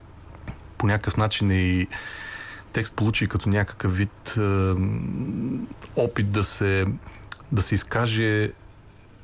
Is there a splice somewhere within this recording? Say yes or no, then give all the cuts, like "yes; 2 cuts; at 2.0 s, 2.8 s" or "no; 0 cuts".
yes; 1 cut; at 2.9 s